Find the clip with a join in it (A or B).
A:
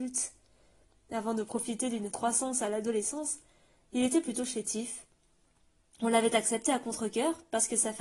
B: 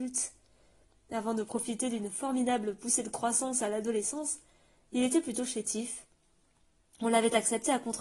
A